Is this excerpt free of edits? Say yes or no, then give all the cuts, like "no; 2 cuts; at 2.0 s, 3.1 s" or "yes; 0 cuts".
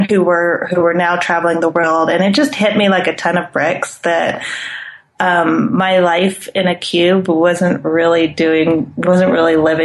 yes; 0 cuts